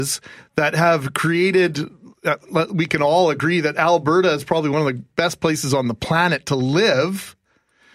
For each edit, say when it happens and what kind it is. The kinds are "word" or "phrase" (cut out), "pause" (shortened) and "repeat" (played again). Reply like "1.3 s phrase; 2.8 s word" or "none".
none